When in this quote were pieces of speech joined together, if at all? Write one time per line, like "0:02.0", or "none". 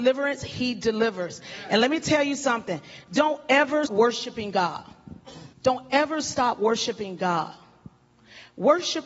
0:03.9
0:05.5